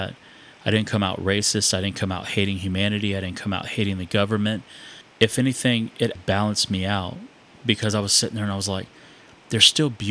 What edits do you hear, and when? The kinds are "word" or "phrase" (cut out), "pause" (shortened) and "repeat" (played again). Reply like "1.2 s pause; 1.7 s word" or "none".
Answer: 5.1 s pause; 6.2 s word